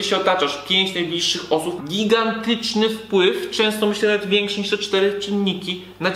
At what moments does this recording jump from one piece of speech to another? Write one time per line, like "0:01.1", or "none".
0:01.8